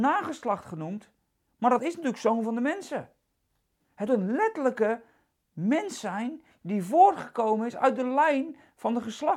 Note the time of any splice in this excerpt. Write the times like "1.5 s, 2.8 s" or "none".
1.8 s, 4.1 s